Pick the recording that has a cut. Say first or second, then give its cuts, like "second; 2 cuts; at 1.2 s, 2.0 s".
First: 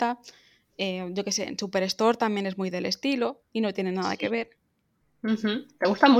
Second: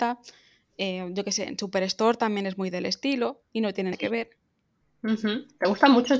second; 1 cut; at 3.9 s